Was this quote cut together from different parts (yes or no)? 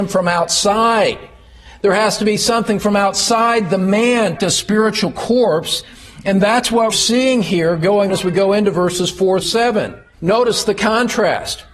yes